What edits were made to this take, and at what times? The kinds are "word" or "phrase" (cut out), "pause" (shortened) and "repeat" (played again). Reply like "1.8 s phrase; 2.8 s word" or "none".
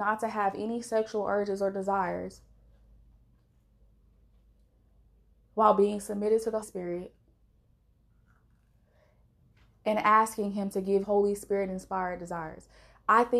6.6 s word; 11.0 s word